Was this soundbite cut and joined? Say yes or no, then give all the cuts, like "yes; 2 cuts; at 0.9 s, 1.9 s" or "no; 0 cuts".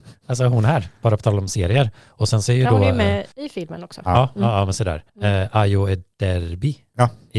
yes; 2 cuts; at 3.3 s, 5.1 s